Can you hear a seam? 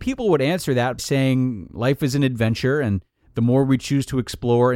yes; 1 cut; at 1.0 s

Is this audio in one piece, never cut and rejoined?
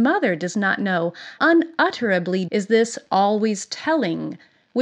no; 2 cuts; at 1.4 s, 2.5 s

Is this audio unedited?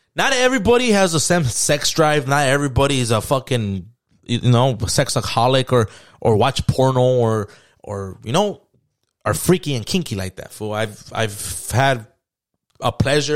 yes; 0 cuts

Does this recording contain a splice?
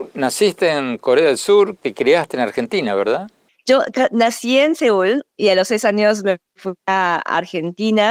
yes; 2 cuts; at 1.8 s, 3.5 s

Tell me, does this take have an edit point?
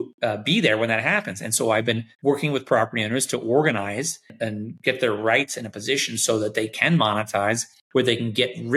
yes; 1 cut; at 2.1 s

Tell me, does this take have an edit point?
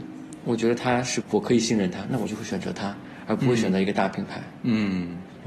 yes; 1 cut; at 1.2 s

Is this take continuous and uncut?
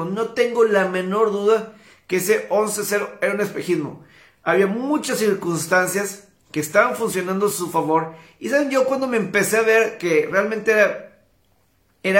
yes; 0 cuts

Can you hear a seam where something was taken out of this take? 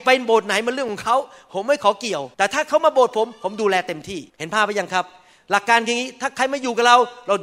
yes; 2 cuts; at 2.3 s, 4.3 s

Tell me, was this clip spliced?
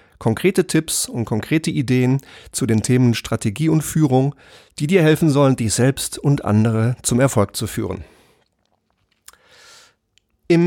no; 0 cuts

